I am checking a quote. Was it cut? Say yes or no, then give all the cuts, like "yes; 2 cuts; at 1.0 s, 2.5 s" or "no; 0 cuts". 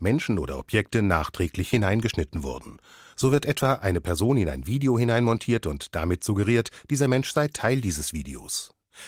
no; 0 cuts